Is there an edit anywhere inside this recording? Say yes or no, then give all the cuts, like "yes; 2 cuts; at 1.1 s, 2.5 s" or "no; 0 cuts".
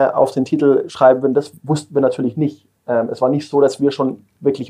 no; 0 cuts